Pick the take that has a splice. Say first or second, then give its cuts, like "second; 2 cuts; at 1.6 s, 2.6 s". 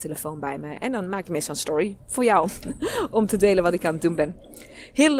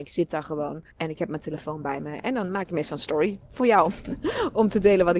second; 1 cut; at 0.9 s